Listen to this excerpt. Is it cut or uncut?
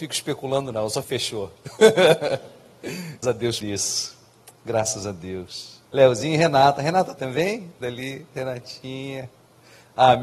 cut